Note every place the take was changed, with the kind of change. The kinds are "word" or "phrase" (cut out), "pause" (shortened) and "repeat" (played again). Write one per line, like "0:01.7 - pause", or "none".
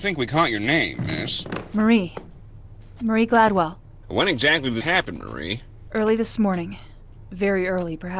0:04.8 - word